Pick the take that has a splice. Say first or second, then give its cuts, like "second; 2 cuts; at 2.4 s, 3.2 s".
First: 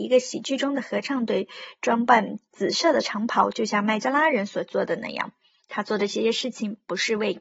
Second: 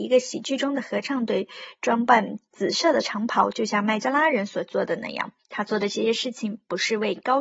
second; 1 cut; at 5.4 s